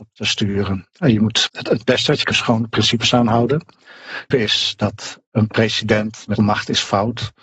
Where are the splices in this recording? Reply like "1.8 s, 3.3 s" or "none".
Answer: 1.5 s, 2.3 s, 4.3 s, 6.4 s